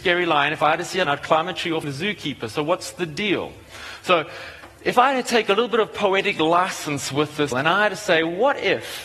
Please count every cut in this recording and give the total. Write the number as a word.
three